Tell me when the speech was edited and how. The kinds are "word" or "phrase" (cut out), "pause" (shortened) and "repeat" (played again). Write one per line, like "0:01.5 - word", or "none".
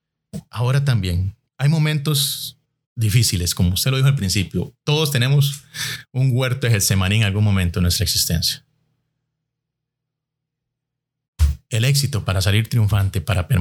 0:01.5 - pause
0:02.6 - pause